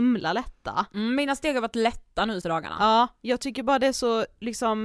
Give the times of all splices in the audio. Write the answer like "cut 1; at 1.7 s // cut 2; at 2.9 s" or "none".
cut 1; at 2.4 s